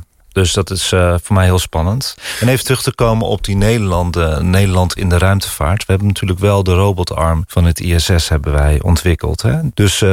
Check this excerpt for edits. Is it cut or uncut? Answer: uncut